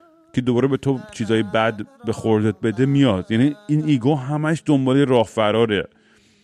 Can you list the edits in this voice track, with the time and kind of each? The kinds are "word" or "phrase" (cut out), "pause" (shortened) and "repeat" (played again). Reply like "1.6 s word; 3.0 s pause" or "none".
1.9 s pause